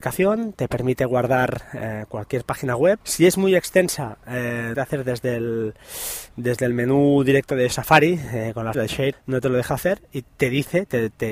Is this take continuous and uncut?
no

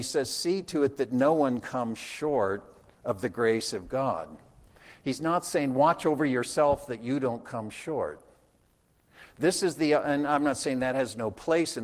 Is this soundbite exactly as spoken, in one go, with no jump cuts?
yes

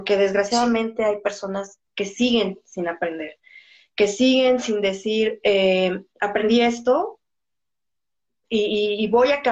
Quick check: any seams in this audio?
no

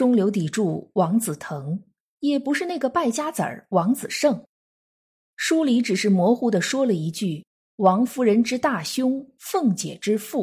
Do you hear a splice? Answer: no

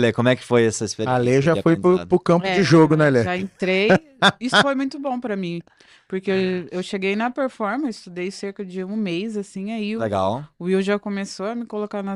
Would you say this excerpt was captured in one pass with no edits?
yes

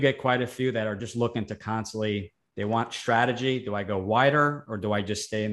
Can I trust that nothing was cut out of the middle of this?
yes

